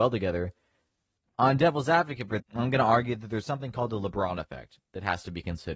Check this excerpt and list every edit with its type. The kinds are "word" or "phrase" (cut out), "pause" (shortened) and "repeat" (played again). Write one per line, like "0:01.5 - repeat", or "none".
0:02.4 - word